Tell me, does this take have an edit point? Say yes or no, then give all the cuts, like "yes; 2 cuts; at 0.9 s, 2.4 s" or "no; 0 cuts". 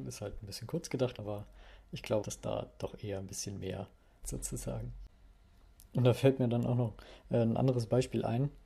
yes; 3 cuts; at 1.2 s, 2.2 s, 4.2 s